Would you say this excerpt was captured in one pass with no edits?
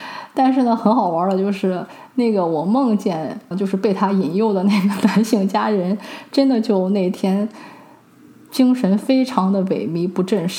no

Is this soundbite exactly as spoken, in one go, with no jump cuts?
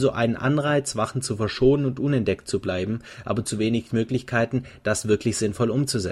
yes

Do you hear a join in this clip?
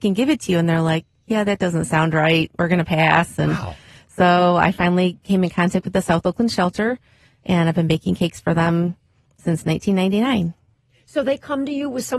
no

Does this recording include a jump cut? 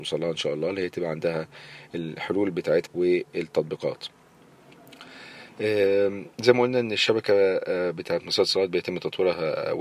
yes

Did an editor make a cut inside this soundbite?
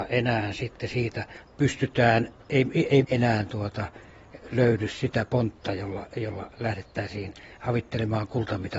yes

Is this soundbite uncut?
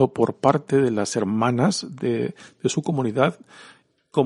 yes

